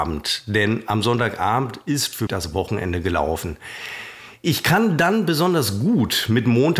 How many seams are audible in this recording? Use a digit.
1